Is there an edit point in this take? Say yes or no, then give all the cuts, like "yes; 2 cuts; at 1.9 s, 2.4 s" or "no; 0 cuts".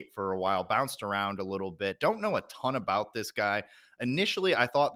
no; 0 cuts